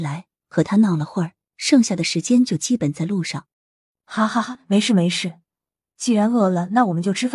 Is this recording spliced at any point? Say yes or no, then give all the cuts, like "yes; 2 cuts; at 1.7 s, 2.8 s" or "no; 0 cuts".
yes; 1 cut; at 3.5 s